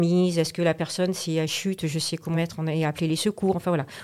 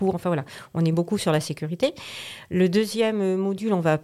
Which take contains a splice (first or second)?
first